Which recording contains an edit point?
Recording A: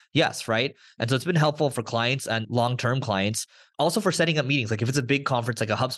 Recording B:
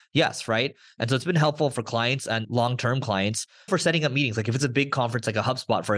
B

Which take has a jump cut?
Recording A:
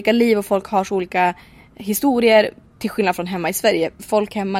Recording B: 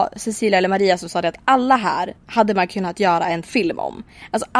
B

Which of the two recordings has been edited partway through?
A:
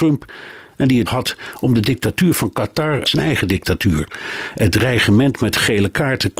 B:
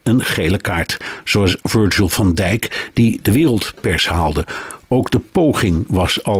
A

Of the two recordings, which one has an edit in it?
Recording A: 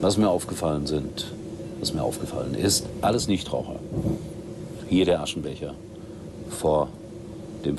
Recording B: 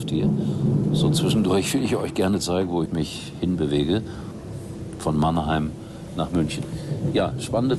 B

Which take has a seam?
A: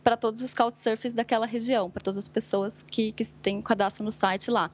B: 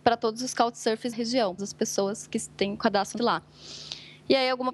B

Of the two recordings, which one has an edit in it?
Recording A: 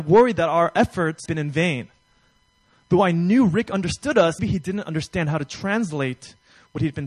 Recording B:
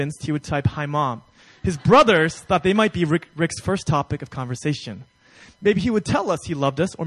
A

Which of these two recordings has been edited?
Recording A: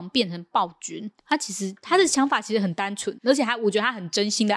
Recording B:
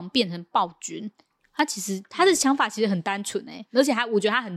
A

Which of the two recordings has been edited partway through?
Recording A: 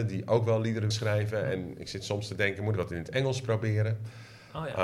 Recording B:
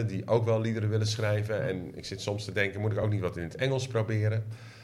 A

